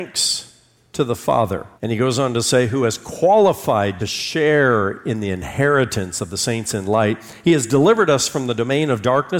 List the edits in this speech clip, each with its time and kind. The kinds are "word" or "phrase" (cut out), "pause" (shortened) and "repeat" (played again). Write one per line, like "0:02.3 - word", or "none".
0:01.8 - pause
0:04.0 - phrase